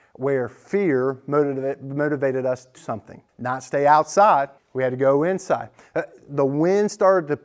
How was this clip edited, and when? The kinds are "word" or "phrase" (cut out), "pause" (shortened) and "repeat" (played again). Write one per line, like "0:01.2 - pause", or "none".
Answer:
0:02.8 - word
0:03.3 - pause
0:04.6 - pause